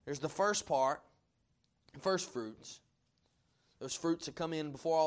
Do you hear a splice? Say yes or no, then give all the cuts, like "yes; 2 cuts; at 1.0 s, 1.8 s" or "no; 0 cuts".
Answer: no; 0 cuts